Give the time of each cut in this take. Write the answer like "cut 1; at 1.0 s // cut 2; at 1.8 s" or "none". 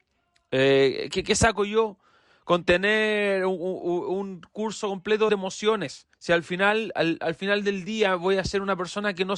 cut 1; at 5.3 s // cut 2; at 6.1 s